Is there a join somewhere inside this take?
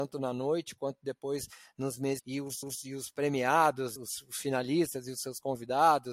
yes; 3 cuts; at 2.2 s, 2.6 s, 4.0 s

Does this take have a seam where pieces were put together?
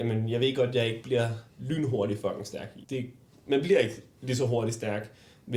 yes; 2 cuts; at 1.5 s, 2.8 s

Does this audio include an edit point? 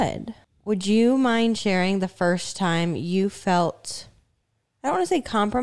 no; 0 cuts

